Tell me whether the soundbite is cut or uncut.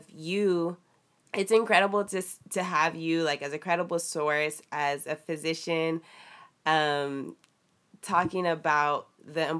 uncut